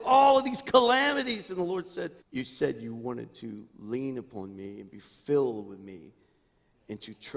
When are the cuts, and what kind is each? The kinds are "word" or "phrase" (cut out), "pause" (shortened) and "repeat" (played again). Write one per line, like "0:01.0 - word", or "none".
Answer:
0:02.2 - pause